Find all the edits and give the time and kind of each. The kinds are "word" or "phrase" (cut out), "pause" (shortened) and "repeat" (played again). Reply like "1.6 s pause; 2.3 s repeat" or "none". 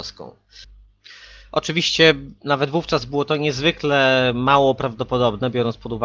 none